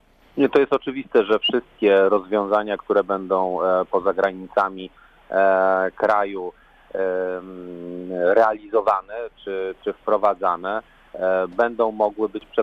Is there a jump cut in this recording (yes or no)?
yes